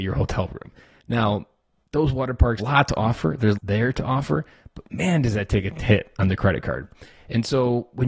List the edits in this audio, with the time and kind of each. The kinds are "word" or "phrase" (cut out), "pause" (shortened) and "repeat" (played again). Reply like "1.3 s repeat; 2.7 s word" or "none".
2.6 s word; 3.6 s word